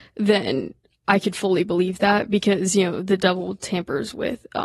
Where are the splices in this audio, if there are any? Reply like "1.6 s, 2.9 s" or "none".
none

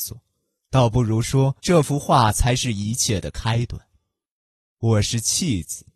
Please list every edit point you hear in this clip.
1.6 s

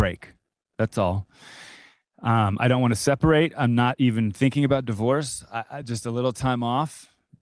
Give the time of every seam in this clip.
none

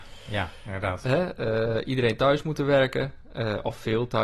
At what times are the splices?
none

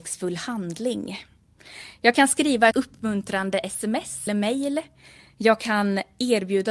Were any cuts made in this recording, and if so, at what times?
2.7 s, 4.3 s

